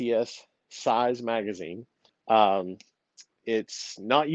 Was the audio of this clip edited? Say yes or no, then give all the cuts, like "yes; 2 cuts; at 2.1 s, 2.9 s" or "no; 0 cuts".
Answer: yes; 1 cut; at 2.1 s